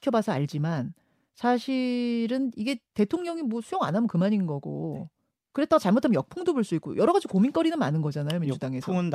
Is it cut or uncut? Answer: uncut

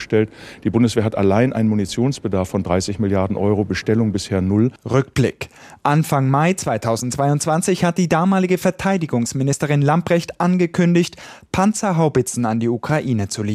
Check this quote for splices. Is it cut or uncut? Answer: uncut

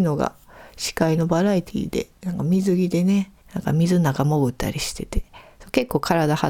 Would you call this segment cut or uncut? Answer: cut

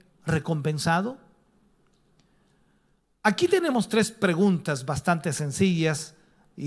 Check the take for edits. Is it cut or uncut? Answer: uncut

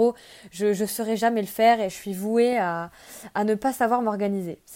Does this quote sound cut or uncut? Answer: uncut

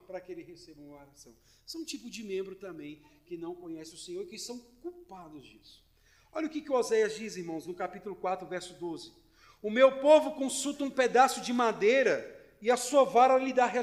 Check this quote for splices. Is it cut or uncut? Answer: uncut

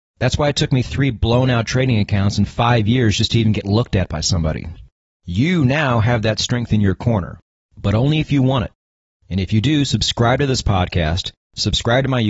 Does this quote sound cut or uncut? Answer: uncut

